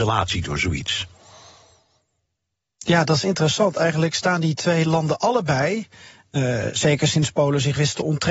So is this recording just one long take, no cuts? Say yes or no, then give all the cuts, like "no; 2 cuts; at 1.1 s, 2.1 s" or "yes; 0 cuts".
yes; 0 cuts